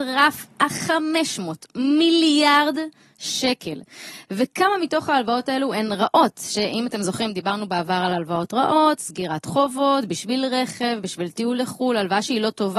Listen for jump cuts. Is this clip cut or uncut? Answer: uncut